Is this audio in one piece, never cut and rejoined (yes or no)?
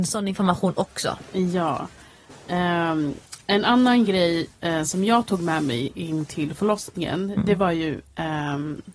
yes